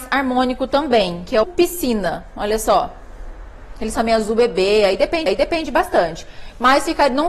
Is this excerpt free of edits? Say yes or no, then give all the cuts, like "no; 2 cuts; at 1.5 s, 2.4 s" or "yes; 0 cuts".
no; 3 cuts; at 1.4 s, 3.9 s, 5.3 s